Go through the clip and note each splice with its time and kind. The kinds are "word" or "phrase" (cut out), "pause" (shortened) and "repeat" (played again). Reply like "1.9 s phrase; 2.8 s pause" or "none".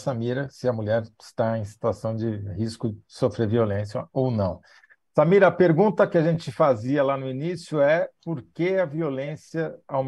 none